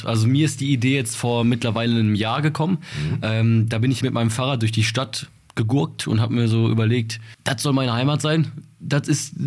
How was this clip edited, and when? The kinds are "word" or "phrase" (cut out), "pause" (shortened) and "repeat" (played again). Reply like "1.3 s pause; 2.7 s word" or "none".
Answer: 4.0 s word